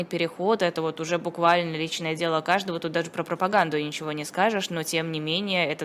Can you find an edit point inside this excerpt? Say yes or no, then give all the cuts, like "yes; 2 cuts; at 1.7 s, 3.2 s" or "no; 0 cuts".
no; 0 cuts